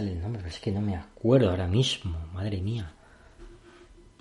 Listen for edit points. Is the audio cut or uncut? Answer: uncut